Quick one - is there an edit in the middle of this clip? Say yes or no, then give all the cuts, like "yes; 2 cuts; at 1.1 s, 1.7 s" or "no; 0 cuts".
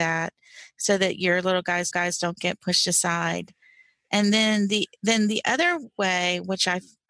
yes; 1 cut; at 1.9 s